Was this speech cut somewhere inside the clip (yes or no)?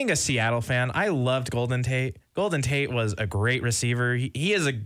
no